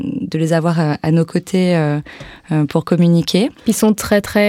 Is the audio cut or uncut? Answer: cut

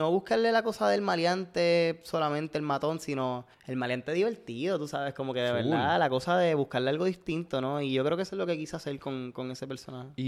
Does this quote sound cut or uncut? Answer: cut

